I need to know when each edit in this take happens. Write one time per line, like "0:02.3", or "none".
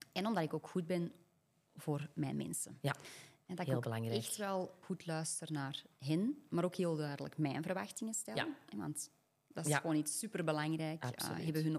0:04.8